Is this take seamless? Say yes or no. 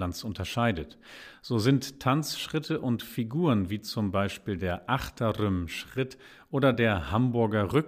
yes